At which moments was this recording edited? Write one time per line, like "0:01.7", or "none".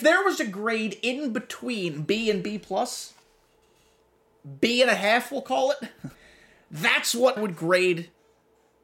0:06.1
0:07.4